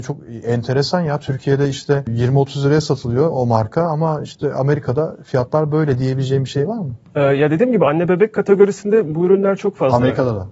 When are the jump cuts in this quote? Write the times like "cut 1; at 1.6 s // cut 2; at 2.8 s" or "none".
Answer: none